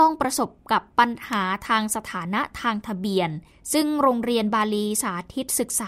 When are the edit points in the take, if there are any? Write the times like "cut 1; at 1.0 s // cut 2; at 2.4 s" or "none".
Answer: cut 1; at 3.5 s